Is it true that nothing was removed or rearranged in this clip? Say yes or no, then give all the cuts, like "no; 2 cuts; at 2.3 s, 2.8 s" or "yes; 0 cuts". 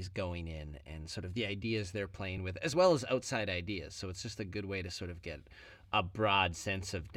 yes; 0 cuts